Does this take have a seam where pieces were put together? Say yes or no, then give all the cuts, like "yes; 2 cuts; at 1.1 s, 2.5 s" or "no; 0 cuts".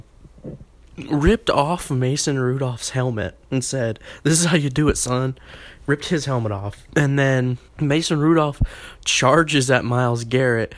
yes; 3 cuts; at 3.4 s, 6.9 s, 7.7 s